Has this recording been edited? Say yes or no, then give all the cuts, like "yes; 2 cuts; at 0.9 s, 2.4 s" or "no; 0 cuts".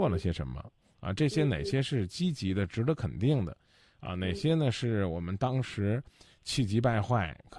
no; 0 cuts